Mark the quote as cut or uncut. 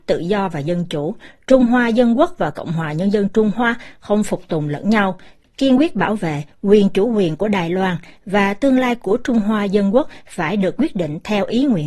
uncut